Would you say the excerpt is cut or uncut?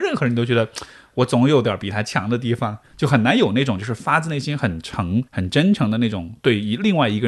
cut